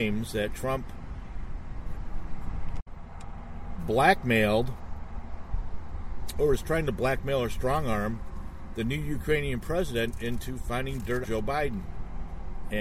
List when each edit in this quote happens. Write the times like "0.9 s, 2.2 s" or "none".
11.2 s